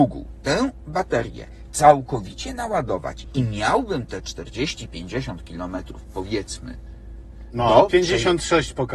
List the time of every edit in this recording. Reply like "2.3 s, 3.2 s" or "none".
none